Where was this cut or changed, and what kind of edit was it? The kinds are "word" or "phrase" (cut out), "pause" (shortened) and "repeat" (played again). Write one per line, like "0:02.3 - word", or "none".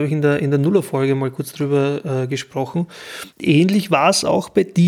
0:03.3 - pause